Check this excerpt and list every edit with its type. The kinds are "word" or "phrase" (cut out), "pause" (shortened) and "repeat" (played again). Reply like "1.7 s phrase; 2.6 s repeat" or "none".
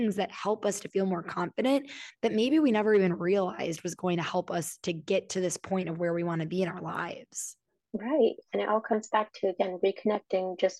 none